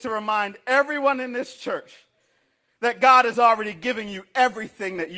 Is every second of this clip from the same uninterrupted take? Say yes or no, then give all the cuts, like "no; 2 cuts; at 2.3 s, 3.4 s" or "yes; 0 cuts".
yes; 0 cuts